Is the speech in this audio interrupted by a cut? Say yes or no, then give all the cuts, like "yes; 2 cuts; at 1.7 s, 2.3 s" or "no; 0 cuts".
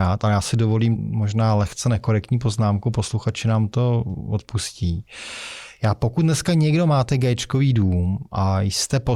yes; 1 cut; at 1.0 s